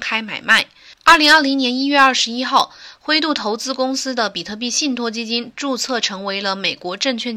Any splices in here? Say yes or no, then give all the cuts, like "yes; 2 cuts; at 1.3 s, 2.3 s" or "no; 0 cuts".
yes; 1 cut; at 1.0 s